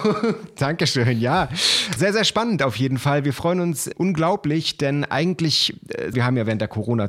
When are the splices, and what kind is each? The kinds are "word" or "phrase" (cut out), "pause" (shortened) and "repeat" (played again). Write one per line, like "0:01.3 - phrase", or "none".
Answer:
0:02.0 - word
0:03.9 - word
0:06.1 - phrase